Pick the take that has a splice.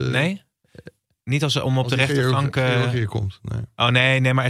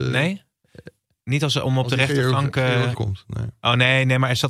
second; 1 cut; at 2.9 s

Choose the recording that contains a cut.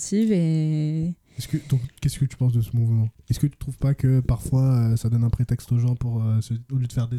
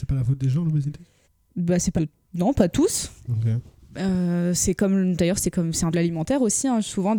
second; 4 cuts; at 1.2 s, 2.0 s, 3.2 s, 5.9 s

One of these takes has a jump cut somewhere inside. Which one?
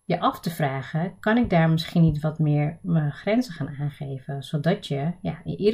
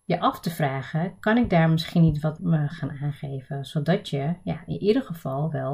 second; 2 cuts; at 2.4 s, 2.7 s

